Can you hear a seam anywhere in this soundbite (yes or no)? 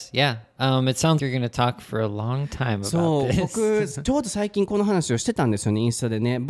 yes